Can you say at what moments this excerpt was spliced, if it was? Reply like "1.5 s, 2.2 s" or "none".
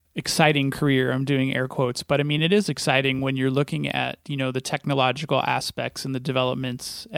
none